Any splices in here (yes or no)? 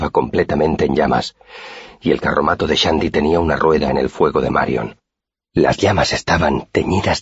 no